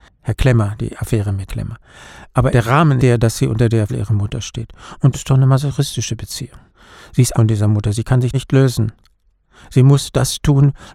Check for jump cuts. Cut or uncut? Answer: cut